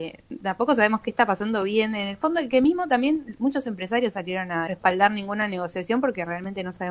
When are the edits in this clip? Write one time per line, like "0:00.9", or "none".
0:04.7

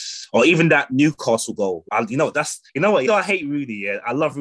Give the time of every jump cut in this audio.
0:01.9
0:02.7
0:03.1

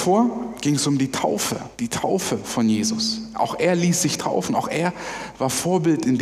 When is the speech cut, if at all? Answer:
0:01.7

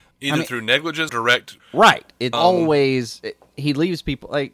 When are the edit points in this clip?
0:01.1
0:01.6
0:02.3

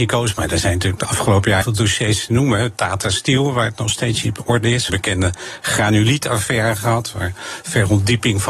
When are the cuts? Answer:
0:01.6
0:04.9

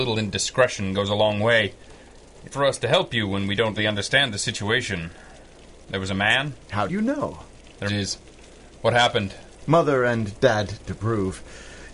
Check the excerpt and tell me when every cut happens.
0:02.5
0:03.8
0:06.9
0:07.9
0:10.9

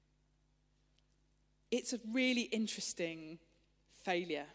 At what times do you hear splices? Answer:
none

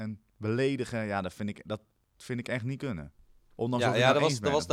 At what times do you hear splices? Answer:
none

